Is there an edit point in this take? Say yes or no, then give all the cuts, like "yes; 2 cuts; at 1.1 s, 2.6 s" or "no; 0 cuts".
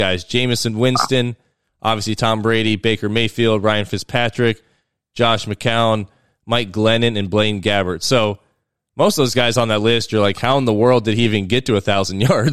no; 0 cuts